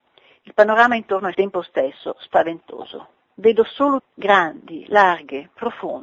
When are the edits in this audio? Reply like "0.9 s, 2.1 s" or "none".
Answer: 1.3 s, 3.3 s, 4.0 s